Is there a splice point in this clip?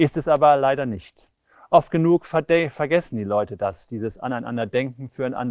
no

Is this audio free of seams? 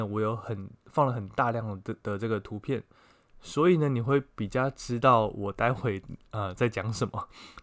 yes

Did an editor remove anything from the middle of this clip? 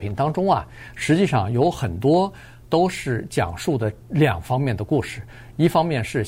no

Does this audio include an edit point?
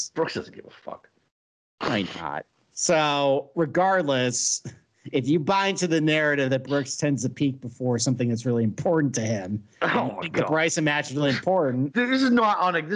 no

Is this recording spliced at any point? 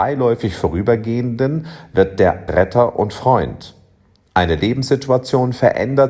yes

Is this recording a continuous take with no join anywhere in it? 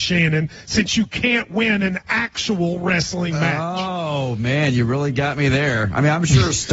yes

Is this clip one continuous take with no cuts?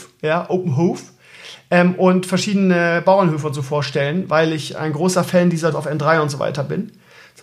no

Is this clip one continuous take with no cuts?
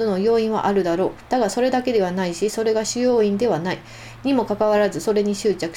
no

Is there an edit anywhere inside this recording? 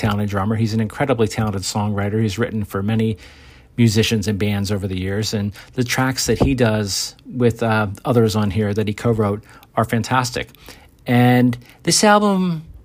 no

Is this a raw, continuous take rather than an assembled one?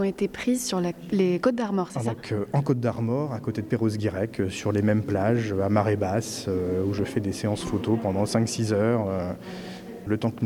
yes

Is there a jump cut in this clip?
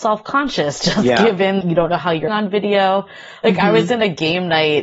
yes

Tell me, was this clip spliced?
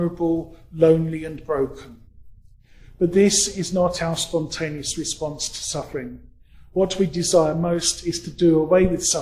no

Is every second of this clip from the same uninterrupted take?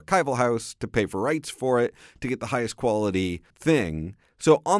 no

